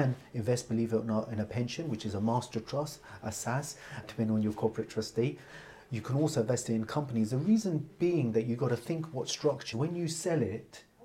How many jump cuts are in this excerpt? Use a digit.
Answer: 2